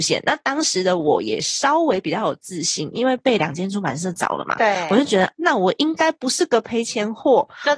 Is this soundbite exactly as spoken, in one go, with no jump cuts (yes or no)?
no